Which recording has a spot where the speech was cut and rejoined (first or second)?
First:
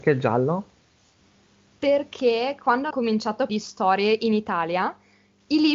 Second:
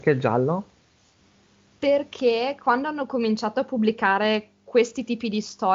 first